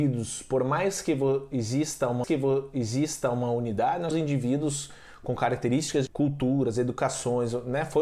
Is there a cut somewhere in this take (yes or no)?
yes